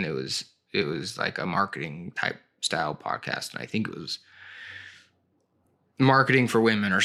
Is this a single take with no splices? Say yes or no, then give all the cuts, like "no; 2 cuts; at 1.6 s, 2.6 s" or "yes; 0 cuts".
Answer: yes; 0 cuts